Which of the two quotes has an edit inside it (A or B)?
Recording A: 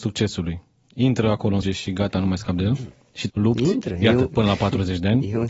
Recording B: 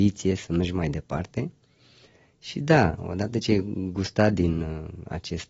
A